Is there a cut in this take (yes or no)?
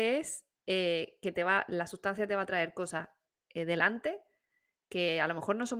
no